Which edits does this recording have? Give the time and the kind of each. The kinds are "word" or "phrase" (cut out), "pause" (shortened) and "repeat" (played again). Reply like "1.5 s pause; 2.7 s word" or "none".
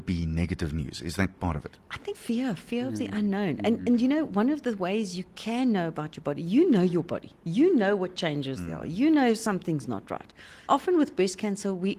2.1 s word; 10.7 s word